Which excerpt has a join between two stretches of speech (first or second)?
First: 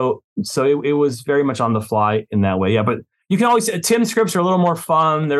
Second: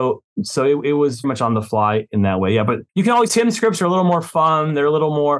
second